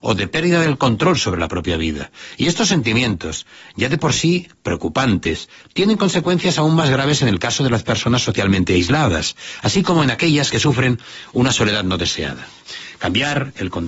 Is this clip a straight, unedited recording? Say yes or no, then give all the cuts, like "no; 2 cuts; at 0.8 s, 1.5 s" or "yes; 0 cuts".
yes; 0 cuts